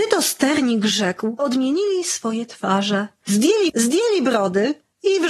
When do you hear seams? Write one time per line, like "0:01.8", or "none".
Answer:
0:01.4
0:03.7